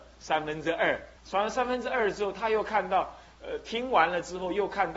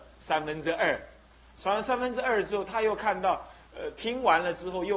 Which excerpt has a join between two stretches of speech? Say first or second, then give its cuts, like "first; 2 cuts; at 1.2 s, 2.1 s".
first; 1 cut; at 1.2 s